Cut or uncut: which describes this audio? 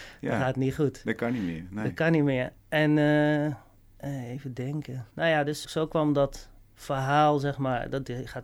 cut